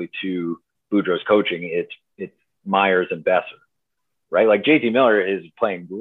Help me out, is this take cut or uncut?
uncut